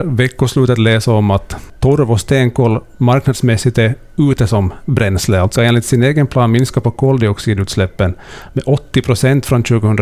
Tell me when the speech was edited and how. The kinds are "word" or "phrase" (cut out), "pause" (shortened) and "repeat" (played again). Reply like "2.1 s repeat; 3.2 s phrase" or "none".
5.6 s phrase